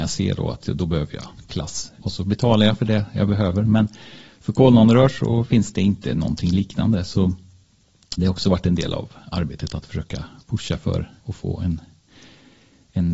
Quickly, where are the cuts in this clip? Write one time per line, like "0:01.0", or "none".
0:02.0
0:08.2
0:11.2